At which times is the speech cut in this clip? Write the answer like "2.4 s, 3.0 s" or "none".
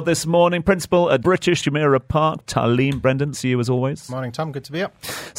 1.2 s, 1.6 s, 2.4 s, 3.3 s